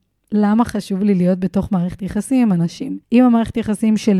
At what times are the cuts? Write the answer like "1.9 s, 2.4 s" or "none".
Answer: 3.0 s